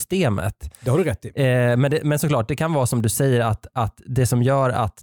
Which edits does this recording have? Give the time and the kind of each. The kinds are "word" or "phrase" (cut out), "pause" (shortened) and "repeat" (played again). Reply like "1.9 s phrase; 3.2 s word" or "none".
none